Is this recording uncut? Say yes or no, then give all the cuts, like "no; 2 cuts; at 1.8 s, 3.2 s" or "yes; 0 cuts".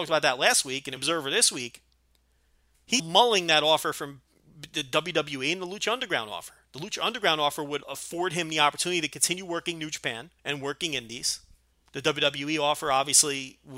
no; 5 cuts; at 1.0 s, 3.0 s, 7.8 s, 10.4 s, 11.7 s